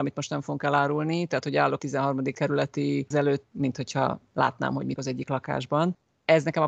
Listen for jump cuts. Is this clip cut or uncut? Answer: cut